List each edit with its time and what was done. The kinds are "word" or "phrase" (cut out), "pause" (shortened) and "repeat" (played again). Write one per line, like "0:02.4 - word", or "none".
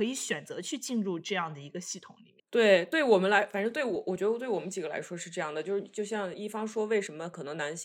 0:02.5 - pause